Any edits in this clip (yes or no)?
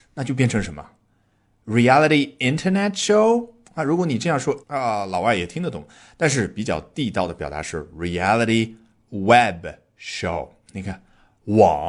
yes